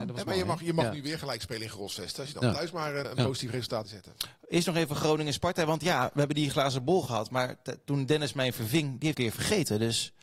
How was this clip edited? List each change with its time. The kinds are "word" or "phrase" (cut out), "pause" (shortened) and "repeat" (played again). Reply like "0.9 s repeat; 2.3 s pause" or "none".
3.0 s word; 3.8 s phrase; 9.1 s phrase